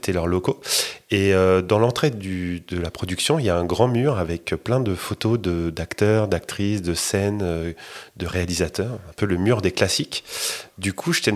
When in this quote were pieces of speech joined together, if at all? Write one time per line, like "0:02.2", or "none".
none